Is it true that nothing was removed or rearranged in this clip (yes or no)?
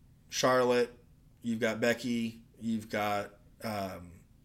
yes